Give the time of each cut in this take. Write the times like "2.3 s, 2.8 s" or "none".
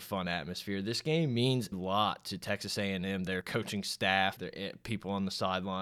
1.7 s, 3.4 s, 4.4 s